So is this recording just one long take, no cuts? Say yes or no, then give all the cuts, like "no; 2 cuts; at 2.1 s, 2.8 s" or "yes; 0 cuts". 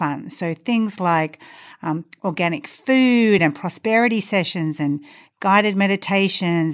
yes; 0 cuts